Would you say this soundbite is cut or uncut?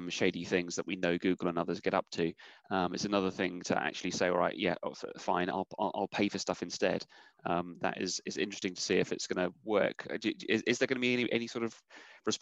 uncut